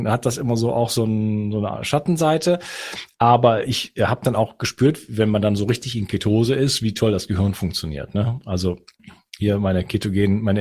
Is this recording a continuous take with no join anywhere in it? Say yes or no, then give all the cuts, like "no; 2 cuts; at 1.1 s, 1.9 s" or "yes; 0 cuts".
yes; 0 cuts